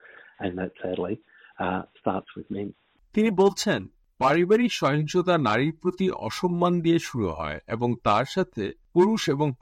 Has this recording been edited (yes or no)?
no